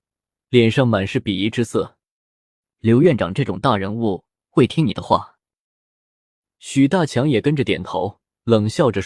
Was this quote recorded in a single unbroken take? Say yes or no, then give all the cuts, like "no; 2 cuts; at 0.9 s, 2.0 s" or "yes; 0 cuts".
yes; 0 cuts